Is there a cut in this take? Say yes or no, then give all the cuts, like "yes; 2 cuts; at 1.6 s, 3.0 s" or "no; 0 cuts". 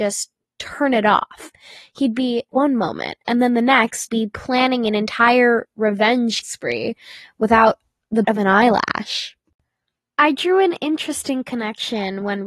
yes; 4 cuts; at 2.5 s, 4.1 s, 6.4 s, 8.2 s